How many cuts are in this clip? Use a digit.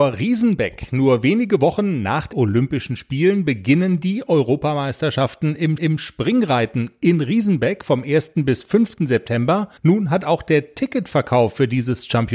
3